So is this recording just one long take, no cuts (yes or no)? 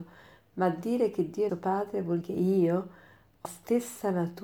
no